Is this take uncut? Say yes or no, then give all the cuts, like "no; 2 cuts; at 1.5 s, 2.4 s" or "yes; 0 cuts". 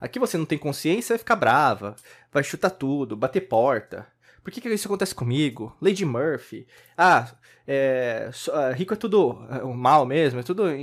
yes; 0 cuts